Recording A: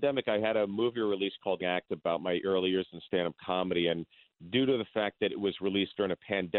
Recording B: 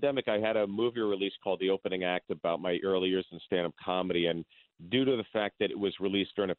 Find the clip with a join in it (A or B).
A